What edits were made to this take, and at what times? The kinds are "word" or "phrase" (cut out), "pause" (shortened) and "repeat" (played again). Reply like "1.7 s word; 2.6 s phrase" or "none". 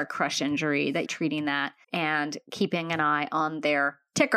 1.0 s word; 1.8 s pause